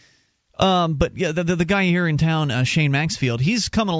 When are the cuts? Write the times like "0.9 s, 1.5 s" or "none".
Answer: none